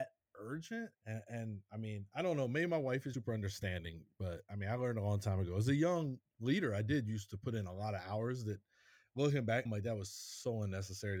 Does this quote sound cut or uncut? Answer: cut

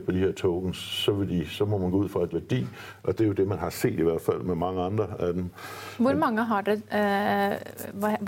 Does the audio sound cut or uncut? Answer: cut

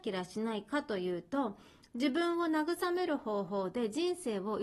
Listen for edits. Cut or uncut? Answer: uncut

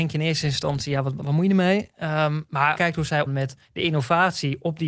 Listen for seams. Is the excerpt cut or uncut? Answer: cut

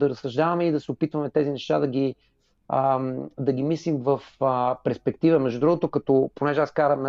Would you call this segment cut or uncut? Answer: uncut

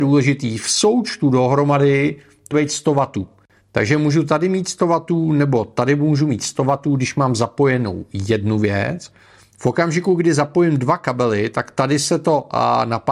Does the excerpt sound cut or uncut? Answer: cut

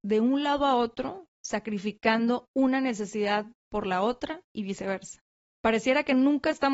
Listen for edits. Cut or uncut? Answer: uncut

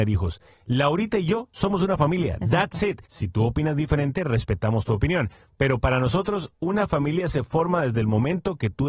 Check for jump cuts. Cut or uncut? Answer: cut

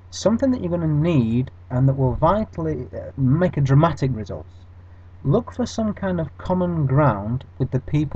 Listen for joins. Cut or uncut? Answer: cut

